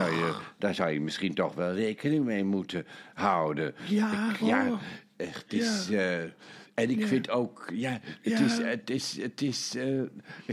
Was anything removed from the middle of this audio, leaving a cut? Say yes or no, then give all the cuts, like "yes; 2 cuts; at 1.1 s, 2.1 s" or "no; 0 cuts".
yes; 1 cut; at 4.4 s